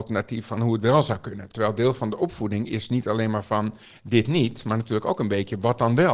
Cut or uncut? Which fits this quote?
uncut